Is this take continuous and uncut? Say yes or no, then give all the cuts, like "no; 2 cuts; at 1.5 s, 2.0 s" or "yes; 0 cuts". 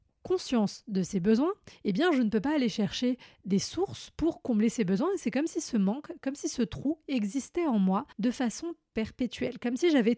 no; 1 cut; at 8.1 s